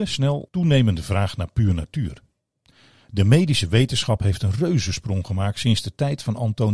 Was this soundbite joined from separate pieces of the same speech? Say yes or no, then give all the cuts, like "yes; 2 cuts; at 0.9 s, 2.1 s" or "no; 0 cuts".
no; 0 cuts